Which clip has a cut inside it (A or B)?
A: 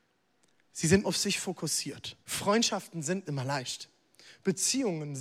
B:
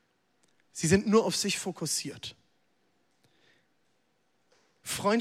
A